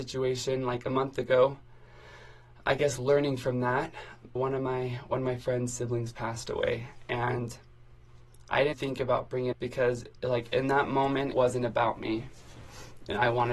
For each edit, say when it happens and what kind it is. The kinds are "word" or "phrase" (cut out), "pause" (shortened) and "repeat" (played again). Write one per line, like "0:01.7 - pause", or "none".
0:02.6 - word
0:04.4 - word
0:08.7 - word
0:09.5 - phrase
0:11.3 - word